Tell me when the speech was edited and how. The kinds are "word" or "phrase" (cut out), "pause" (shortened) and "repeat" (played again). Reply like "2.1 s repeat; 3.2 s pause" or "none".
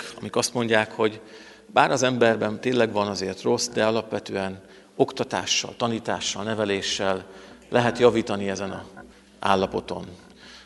none